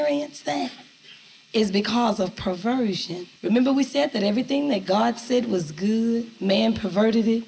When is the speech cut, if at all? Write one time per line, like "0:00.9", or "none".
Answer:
0:03.4